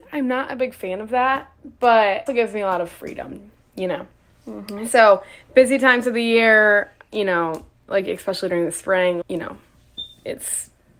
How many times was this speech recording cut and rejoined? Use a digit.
2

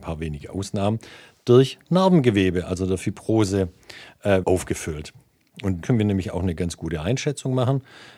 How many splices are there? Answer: 2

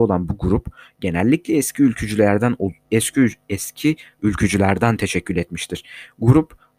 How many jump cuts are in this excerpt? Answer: 1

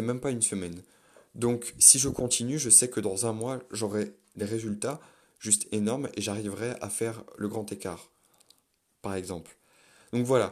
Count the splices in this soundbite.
0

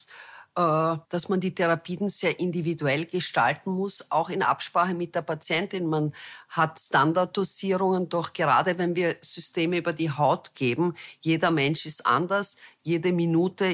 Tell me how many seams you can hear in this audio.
1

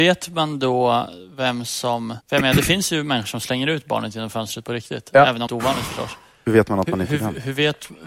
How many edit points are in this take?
2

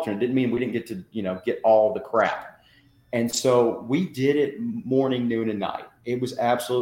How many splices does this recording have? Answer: 0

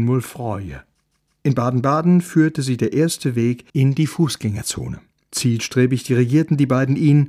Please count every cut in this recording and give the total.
1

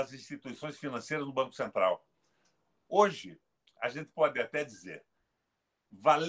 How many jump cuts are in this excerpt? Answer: 0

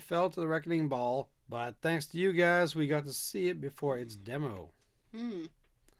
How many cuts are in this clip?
1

